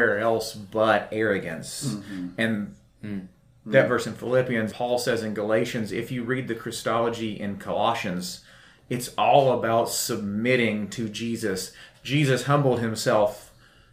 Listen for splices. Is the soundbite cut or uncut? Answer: cut